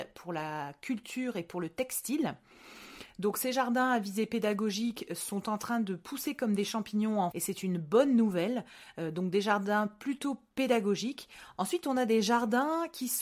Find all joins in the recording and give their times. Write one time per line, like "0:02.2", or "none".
0:07.3

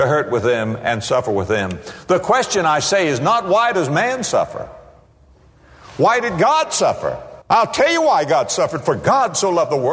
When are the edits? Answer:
0:07.4

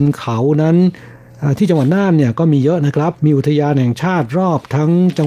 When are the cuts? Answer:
0:03.2

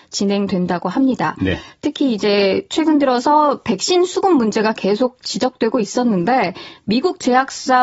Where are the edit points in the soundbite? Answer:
none

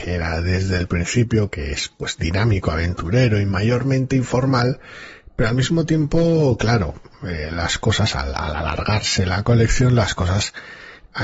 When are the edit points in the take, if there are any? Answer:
none

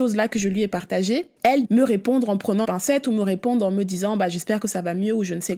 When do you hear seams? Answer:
0:01.6
0:02.6

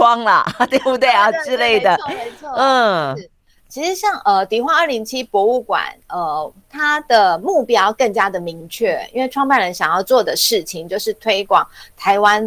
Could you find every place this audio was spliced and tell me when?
none

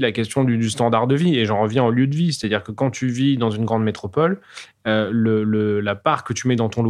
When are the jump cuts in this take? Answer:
none

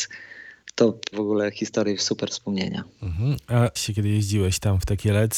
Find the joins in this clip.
0:01.1
0:03.8

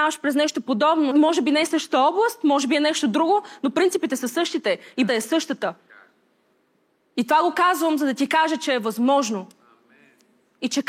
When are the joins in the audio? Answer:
0:01.1
0:05.1
0:06.5

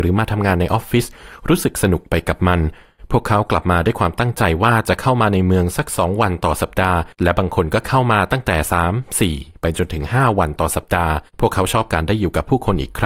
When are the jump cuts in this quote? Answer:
0:07.1
0:11.3

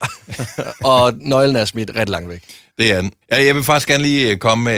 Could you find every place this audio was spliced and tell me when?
0:03.2

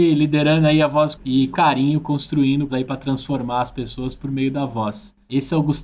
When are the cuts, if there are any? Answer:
0:01.1
0:01.5
0:02.7

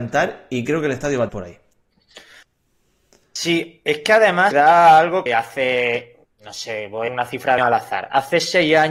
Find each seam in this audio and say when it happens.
0:01.3
0:04.5
0:05.3
0:07.1
0:07.6

